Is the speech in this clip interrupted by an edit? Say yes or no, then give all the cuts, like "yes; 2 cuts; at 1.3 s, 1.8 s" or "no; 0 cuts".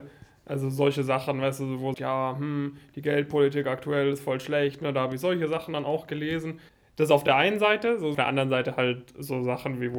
yes; 3 cuts; at 1.9 s, 6.7 s, 8.1 s